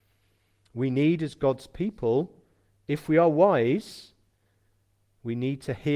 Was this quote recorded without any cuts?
yes; 0 cuts

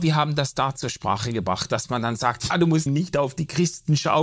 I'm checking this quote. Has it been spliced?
yes; 2 cuts; at 2.5 s, 2.9 s

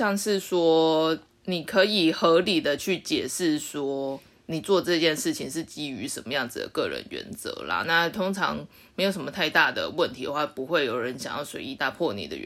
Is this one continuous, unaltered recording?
yes; 0 cuts

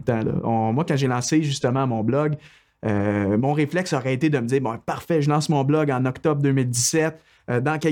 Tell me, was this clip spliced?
no; 0 cuts

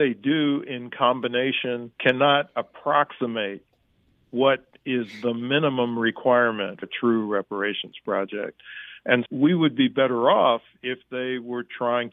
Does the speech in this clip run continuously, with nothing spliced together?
no; 3 cuts; at 1.9 s, 6.8 s, 9.3 s

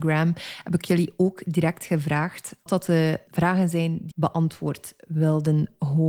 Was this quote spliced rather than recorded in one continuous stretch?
yes; 3 cuts; at 2.7 s, 3.3 s, 4.1 s

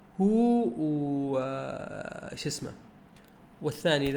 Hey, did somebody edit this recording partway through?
no; 0 cuts

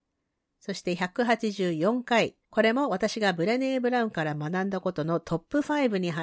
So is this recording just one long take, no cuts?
no; 1 cut; at 2.4 s

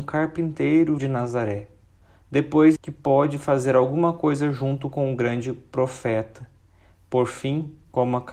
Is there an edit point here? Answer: yes; 2 cuts; at 1.0 s, 2.8 s

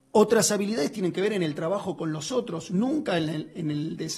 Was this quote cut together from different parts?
no; 0 cuts

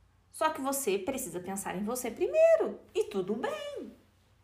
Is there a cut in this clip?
no; 0 cuts

